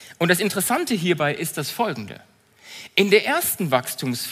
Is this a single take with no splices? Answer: yes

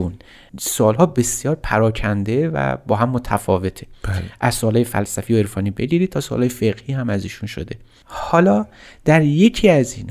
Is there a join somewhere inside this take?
no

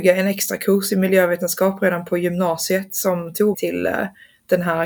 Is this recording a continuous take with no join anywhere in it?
no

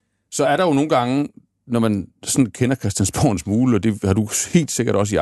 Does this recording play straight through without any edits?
yes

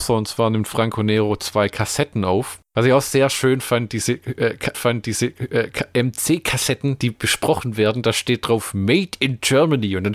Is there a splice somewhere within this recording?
yes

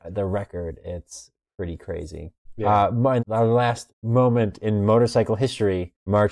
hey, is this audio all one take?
no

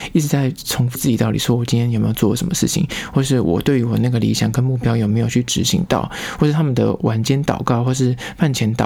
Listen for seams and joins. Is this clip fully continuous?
no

